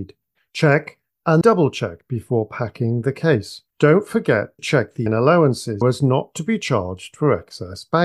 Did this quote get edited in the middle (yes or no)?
yes